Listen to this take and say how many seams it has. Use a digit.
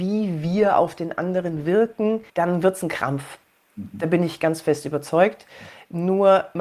1